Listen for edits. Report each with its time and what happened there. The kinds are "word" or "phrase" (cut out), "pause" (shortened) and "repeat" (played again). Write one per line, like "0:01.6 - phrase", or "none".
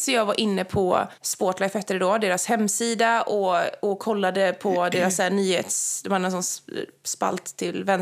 0:01.2 - pause